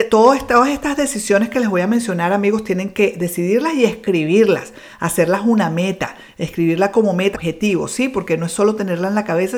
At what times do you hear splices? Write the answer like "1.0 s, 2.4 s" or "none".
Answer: 7.3 s